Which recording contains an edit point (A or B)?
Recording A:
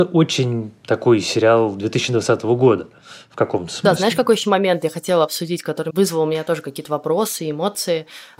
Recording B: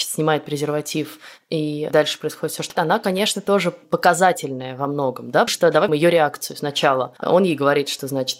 B